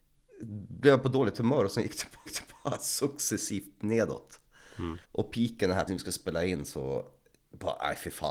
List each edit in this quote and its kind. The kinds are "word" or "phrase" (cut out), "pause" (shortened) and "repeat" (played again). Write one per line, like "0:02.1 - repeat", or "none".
0:02.3 - repeat
0:05.0 - pause
0:05.9 - word
0:07.3 - pause